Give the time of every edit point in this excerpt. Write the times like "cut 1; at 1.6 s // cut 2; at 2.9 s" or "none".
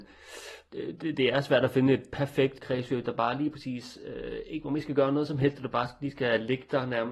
none